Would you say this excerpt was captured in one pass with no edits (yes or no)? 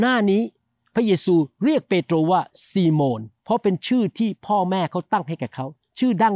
no